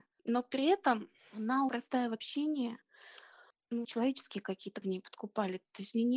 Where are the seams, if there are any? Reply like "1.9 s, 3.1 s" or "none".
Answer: 1.7 s, 3.8 s, 4.8 s